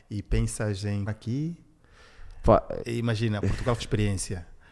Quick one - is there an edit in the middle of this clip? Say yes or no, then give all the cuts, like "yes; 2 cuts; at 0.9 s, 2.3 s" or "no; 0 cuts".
yes; 3 cuts; at 1.1 s, 2.8 s, 3.8 s